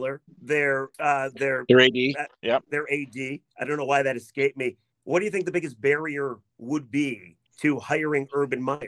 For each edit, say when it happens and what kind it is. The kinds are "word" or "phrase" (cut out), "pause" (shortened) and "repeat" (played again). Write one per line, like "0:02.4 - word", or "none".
0:00.9 - pause
0:04.9 - pause
0:07.5 - pause